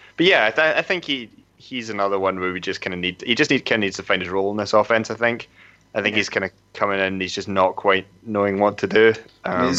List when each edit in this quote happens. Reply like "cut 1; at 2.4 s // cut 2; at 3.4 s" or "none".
none